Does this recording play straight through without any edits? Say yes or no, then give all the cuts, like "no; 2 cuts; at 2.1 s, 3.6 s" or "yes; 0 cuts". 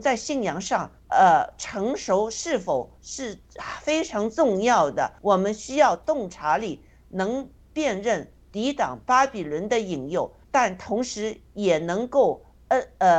no; 4 cuts; at 1.0 s, 3.0 s, 5.2 s, 10.4 s